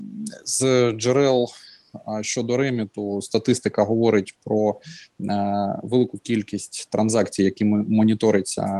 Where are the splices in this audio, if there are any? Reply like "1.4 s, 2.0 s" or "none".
none